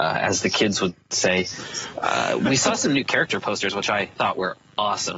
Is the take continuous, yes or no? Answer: yes